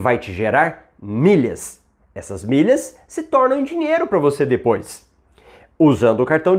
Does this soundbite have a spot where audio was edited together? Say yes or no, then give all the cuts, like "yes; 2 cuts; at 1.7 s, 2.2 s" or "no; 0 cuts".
no; 0 cuts